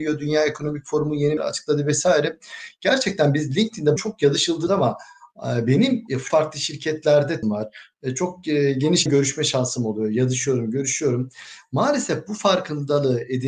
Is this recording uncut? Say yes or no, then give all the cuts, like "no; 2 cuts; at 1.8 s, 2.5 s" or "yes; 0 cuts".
no; 6 cuts; at 1.4 s, 4.0 s, 4.7 s, 6.3 s, 7.4 s, 9.1 s